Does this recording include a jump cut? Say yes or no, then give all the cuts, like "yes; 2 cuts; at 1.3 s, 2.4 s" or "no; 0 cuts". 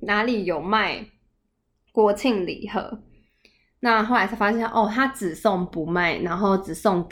no; 0 cuts